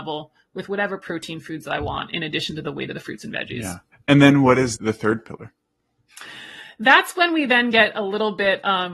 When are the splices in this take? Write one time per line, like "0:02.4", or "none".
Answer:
0:03.9
0:04.8